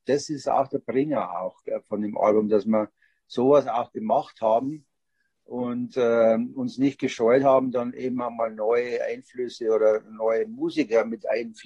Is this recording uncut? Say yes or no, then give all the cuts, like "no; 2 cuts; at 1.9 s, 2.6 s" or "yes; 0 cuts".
yes; 0 cuts